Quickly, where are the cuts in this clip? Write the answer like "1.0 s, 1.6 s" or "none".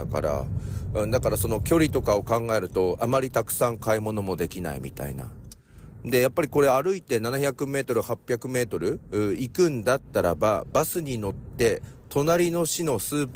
9.0 s